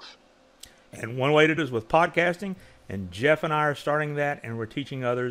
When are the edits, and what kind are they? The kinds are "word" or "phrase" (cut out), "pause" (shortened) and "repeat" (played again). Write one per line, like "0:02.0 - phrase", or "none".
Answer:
0:01.6 - word